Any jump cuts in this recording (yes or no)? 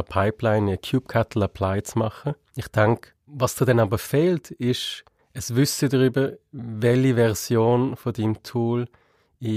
yes